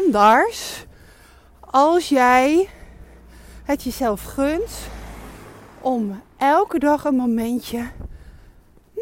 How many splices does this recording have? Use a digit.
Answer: 0